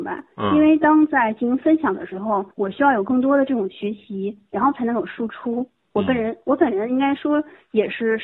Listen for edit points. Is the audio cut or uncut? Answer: cut